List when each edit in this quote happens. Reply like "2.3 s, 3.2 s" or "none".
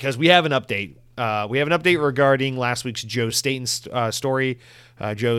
none